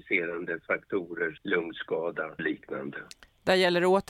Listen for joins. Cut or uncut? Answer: cut